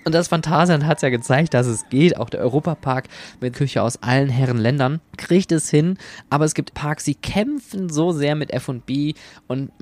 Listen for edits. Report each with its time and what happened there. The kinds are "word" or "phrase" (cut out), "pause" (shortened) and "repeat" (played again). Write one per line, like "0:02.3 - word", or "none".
0:03.5 - phrase
0:05.1 - pause
0:06.7 - phrase